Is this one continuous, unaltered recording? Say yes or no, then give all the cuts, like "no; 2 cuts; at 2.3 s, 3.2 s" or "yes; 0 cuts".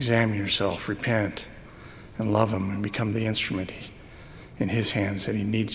yes; 0 cuts